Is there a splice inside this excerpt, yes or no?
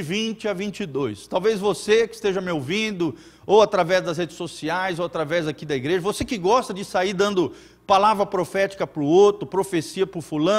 no